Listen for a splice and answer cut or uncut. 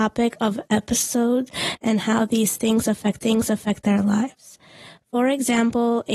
cut